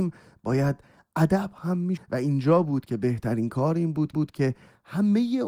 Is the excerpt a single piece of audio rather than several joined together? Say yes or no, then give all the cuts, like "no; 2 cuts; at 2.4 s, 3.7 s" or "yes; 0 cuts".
no; 2 cuts; at 2.0 s, 4.1 s